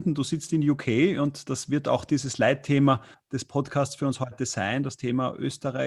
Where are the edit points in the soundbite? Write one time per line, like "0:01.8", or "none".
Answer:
0:03.1

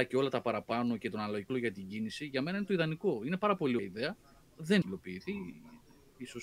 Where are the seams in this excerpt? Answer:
0:01.5
0:03.8
0:04.8

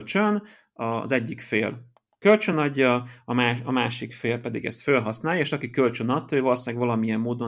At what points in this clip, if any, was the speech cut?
none

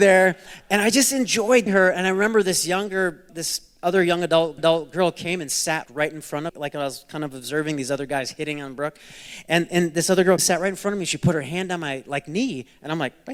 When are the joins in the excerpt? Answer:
0:01.7
0:03.3
0:04.6
0:05.9
0:06.5
0:10.4

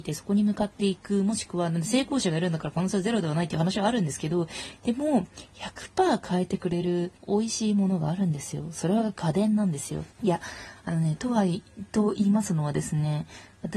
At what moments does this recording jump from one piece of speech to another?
0:07.2
0:10.1

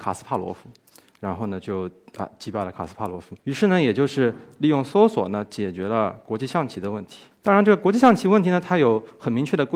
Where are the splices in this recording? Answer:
0:03.4

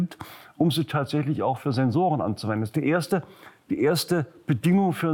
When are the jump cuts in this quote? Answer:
none

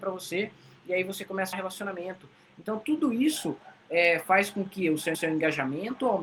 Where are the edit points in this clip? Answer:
0:01.5
0:05.1

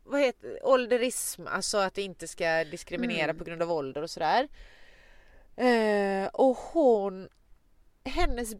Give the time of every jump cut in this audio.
none

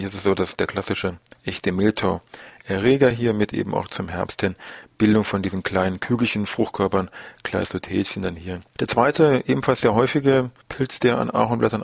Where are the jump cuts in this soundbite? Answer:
none

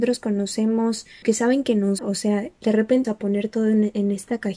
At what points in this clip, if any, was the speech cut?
0:01.2
0:02.0
0:03.0

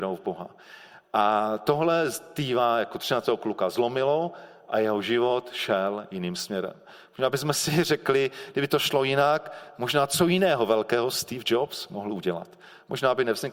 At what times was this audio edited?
none

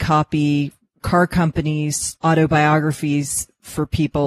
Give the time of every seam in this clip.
0:01.0
0:02.2

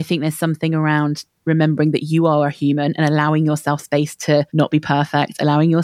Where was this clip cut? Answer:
0:04.5

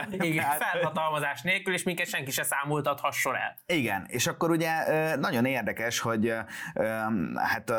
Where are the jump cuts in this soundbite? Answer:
none

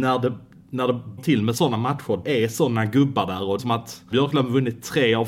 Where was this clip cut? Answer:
0:01.2
0:02.2
0:03.6
0:04.1

